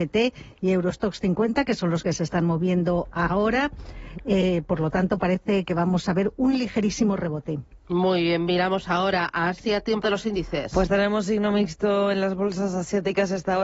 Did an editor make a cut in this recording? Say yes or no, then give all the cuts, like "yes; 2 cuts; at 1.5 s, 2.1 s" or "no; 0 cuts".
yes; 1 cut; at 10.0 s